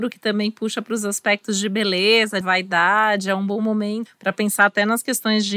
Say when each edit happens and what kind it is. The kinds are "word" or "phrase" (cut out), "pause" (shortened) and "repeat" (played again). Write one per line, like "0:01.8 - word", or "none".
0:02.4 - word
0:04.1 - word

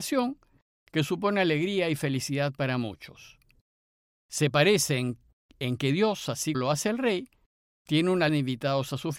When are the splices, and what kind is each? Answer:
0:06.5 - word
0:08.3 - word

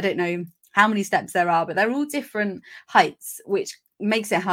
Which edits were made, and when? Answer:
none

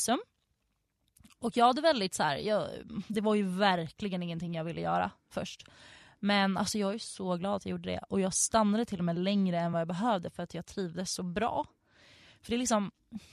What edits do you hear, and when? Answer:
none

